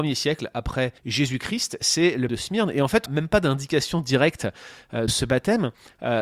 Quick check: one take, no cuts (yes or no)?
no